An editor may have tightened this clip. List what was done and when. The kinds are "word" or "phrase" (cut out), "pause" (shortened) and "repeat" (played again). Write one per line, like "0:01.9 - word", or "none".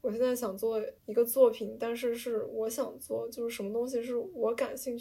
0:01.0 - pause